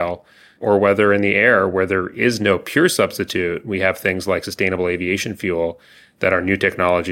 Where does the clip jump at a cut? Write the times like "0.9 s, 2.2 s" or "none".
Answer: none